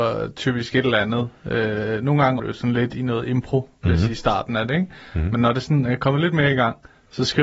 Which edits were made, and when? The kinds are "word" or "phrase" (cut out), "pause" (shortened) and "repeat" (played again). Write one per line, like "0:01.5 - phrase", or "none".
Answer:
0:02.4 - word